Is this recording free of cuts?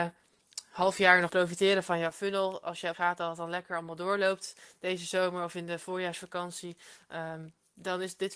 no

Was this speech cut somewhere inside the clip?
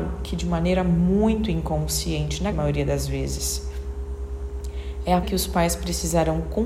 yes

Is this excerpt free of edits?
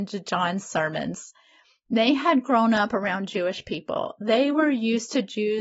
yes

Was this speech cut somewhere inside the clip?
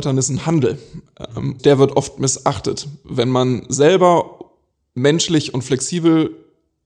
yes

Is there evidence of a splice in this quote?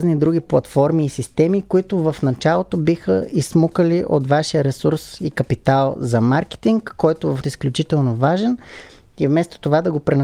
yes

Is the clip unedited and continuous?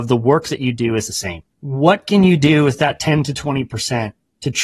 no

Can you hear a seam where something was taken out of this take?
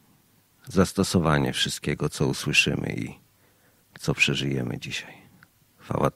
no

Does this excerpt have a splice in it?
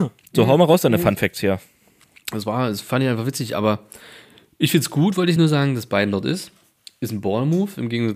no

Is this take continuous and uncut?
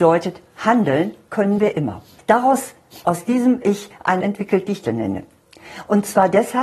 no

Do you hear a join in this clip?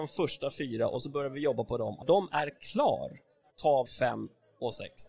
yes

